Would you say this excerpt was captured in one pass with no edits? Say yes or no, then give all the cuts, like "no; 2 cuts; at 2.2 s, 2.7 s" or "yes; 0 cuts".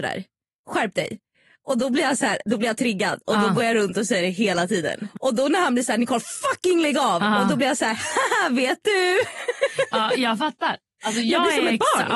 yes; 0 cuts